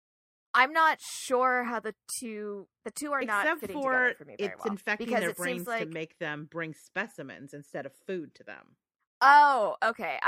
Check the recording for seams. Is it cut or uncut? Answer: uncut